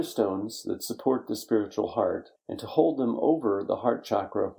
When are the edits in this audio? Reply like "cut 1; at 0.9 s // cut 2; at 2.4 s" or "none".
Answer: cut 1; at 2.4 s